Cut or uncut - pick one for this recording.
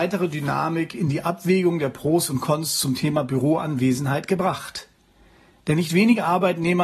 uncut